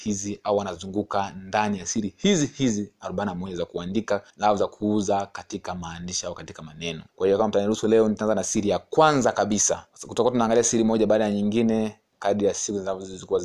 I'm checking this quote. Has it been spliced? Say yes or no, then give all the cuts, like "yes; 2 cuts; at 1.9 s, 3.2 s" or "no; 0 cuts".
yes; 3 cuts; at 4.3 s, 7.1 s, 9.9 s